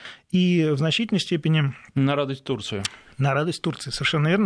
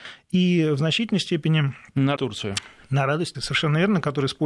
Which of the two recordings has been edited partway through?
second; 2 cuts; at 2.2 s, 3.3 s

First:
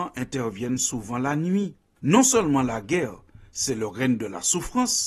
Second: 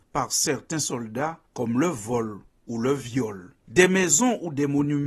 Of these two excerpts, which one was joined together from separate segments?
second; 3 cuts; at 1.5 s, 2.5 s, 3.6 s

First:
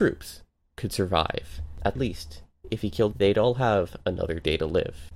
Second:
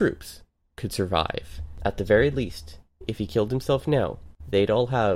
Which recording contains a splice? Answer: first; 2 cuts; at 2.0 s, 3.1 s

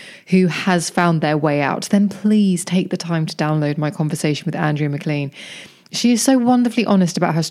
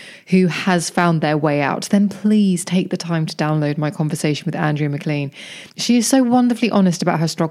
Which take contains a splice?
second; 1 cut; at 5.7 s

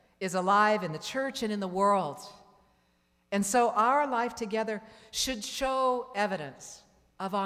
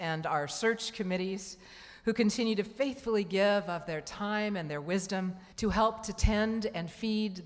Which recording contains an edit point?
second; 1 cut; at 5.5 s

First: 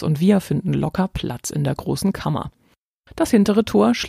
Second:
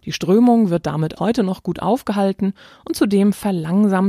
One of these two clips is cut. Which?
second; 1 cut; at 1.2 s

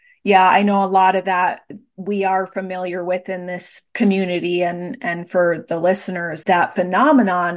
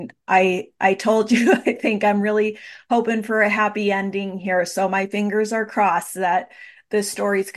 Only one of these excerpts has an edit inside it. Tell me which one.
first; 1 cut; at 6.4 s

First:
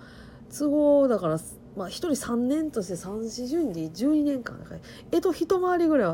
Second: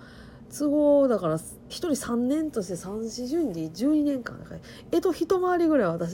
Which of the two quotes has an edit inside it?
second; 1 cut; at 1.7 s

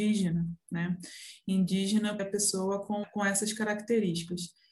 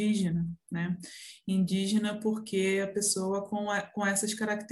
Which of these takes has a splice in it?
first; 2 cuts; at 2.2 s, 3.0 s

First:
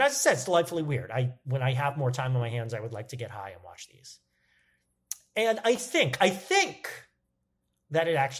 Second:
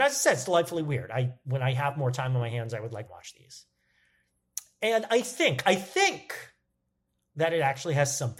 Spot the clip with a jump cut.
second; 1 cut; at 3.1 s

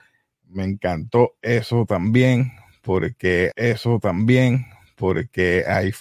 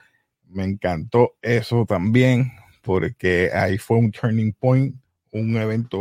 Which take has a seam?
first; 1 cut; at 3.5 s

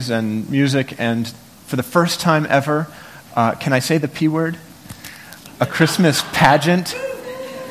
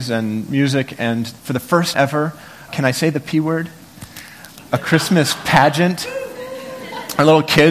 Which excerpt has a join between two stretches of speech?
second; 3 cuts; at 1.4 s, 1.9 s, 2.7 s

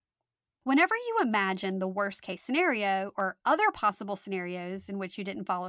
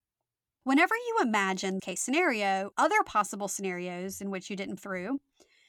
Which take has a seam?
second; 3 cuts; at 1.8 s, 2.7 s, 4.8 s

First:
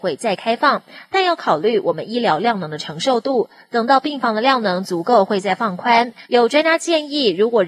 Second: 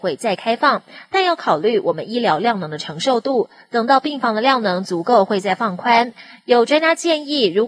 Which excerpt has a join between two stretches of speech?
first; 1 cut; at 6.3 s

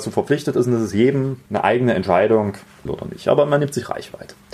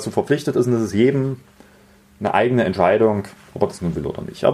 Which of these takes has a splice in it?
first; 2 cuts; at 1.5 s, 2.9 s

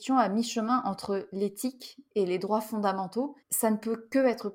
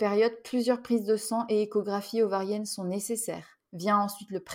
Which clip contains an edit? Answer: first; 1 cut; at 3.4 s

